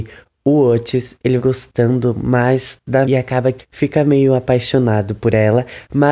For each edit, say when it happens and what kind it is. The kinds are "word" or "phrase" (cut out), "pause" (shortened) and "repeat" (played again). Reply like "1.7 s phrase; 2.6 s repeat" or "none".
1.4 s word; 3.0 s word; 3.6 s word